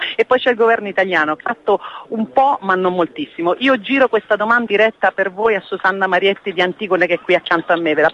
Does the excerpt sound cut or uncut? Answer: cut